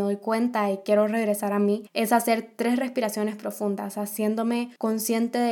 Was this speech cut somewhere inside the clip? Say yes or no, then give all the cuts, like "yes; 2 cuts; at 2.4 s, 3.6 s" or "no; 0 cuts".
no; 0 cuts